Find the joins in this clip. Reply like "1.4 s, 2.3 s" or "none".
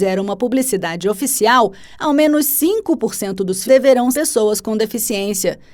3.7 s, 4.1 s

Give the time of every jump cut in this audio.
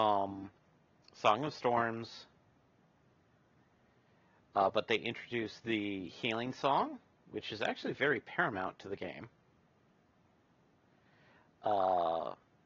none

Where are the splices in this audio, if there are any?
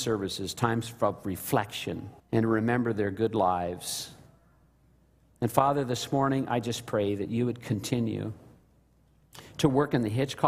2.2 s

